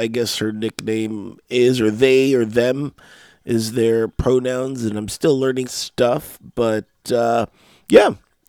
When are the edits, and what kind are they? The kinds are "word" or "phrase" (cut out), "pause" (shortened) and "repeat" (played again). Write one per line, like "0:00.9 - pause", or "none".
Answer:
0:05.6 - phrase

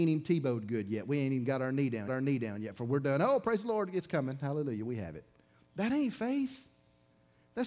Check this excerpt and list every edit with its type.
0:02.1 - repeat
0:05.5 - pause

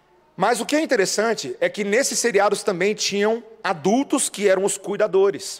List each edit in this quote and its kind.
none

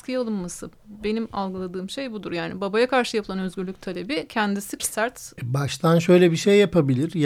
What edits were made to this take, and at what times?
0:04.8 - word

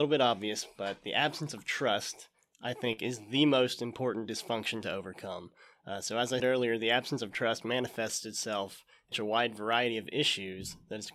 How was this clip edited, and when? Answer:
0:06.4 - word
0:09.1 - word

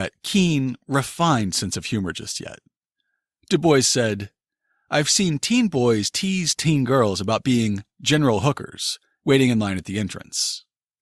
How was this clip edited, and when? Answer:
none

